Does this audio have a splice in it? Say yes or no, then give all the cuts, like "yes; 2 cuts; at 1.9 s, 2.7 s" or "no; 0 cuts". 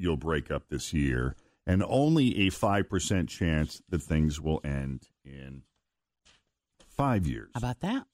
no; 0 cuts